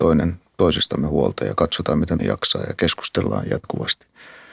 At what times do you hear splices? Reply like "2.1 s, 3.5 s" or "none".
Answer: 2.2 s